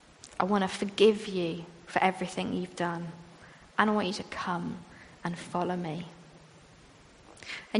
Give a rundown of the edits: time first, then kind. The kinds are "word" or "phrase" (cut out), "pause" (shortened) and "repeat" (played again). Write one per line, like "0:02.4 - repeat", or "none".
none